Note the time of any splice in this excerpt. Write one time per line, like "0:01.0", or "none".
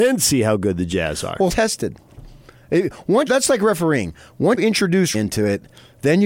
0:01.5
0:03.3
0:04.6
0:05.1